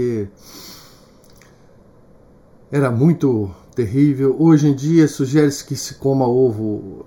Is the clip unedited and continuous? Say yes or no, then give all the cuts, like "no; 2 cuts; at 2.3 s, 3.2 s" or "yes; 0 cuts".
yes; 0 cuts